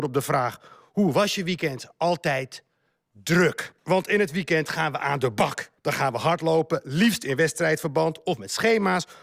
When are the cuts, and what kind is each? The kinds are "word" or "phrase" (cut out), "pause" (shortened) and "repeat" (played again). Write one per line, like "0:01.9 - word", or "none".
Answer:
0:03.8 - pause
0:05.8 - pause